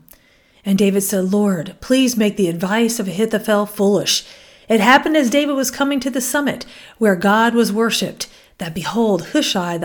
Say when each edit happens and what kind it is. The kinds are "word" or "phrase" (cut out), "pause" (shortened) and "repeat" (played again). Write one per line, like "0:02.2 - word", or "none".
none